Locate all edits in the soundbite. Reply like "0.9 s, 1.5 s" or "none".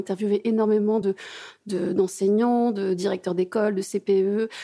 none